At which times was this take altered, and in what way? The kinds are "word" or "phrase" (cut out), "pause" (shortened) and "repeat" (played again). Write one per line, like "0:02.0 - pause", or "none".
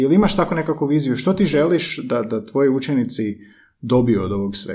none